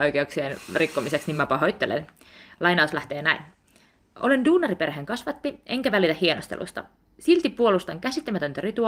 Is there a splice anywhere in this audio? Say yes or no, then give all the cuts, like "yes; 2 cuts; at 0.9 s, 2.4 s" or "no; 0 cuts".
no; 0 cuts